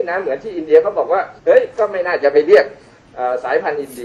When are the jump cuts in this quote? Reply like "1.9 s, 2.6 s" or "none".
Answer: 1.4 s